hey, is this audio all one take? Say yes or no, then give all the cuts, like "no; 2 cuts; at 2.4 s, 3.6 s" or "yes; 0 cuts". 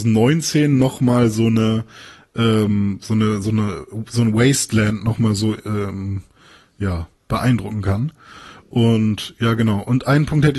yes; 0 cuts